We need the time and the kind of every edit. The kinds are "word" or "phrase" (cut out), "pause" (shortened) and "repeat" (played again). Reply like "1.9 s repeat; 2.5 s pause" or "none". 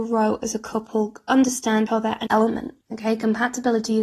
1.9 s word; 2.3 s phrase; 2.8 s pause